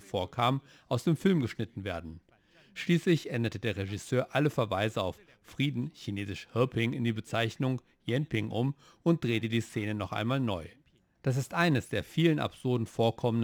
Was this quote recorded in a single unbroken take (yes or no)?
yes